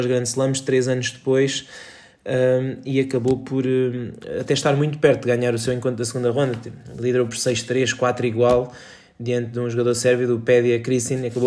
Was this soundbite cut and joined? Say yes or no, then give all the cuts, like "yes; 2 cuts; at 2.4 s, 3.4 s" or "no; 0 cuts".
no; 0 cuts